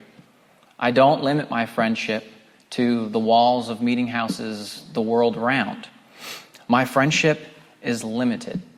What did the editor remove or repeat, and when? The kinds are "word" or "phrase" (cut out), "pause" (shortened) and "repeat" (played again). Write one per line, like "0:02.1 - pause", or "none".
none